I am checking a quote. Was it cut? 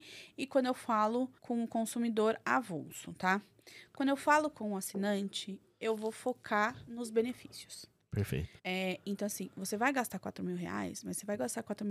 yes; 2 cuts; at 1.4 s, 8.6 s

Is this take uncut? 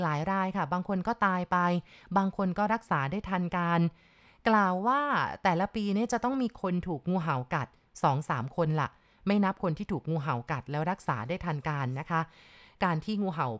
yes; 0 cuts

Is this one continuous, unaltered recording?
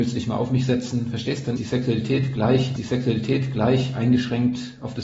no; 2 cuts; at 1.6 s, 2.8 s

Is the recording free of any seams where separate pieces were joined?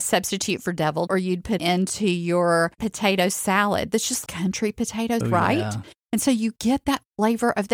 no; 5 cuts; at 1.1 s, 1.6 s, 2.8 s, 4.3 s, 5.2 s

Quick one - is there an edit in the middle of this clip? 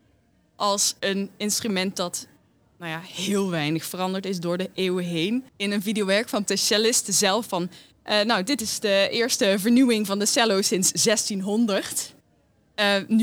yes; 2 cuts; at 5.5 s, 6.5 s

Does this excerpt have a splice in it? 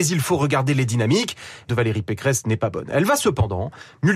yes; 1 cut; at 1.7 s

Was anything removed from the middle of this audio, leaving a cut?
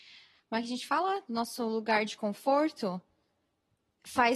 no; 0 cuts

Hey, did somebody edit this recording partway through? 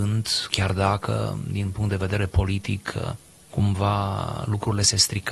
no; 0 cuts

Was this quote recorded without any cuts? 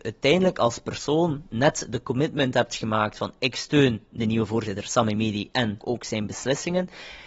no; 1 cut; at 5.8 s

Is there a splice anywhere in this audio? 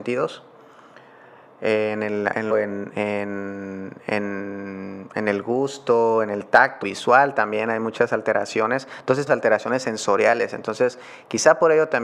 yes; 3 cuts; at 2.5 s, 6.8 s, 9.3 s

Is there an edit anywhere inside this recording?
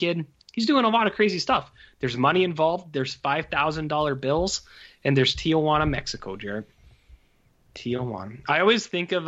no; 0 cuts

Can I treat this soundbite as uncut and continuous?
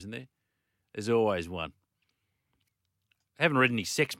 yes; 0 cuts

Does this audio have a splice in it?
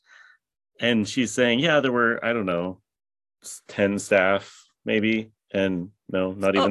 no; 0 cuts

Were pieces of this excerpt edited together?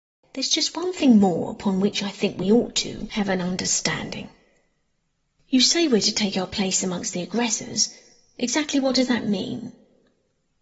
no; 0 cuts

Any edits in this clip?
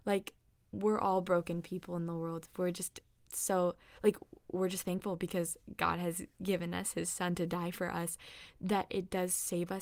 no; 0 cuts

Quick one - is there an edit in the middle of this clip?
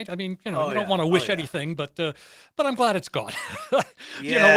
no; 0 cuts

